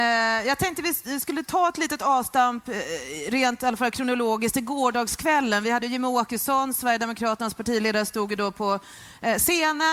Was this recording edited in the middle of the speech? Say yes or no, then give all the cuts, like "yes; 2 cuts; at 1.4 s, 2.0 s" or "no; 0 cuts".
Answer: no; 0 cuts